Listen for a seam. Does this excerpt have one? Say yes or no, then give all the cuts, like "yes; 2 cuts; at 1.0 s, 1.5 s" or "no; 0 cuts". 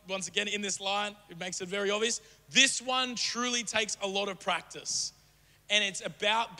no; 0 cuts